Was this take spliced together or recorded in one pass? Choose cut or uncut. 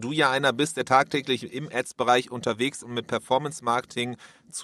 cut